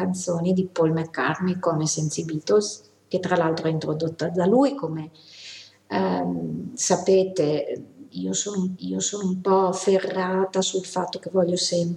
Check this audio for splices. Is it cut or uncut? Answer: cut